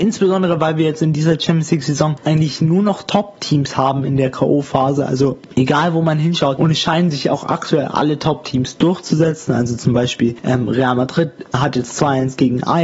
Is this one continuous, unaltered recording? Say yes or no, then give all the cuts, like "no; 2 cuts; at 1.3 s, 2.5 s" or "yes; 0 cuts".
yes; 0 cuts